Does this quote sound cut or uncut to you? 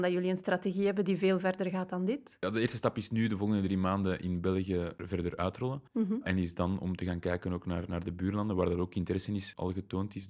uncut